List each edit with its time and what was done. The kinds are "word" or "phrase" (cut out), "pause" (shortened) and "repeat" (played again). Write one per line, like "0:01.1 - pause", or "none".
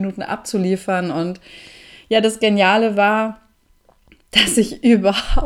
none